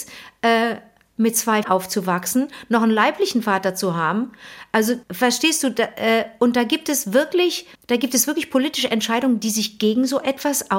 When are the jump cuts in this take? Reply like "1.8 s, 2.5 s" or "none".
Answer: 1.6 s, 5.0 s, 7.7 s